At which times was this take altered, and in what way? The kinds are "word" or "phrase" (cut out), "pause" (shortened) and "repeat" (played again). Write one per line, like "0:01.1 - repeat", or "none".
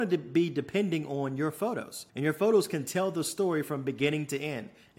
0:02.1 - pause